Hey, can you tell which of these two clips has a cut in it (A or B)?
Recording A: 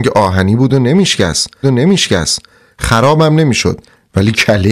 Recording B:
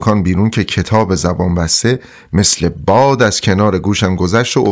A